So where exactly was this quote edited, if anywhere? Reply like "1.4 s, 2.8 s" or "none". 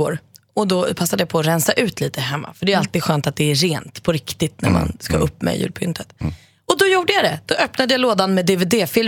none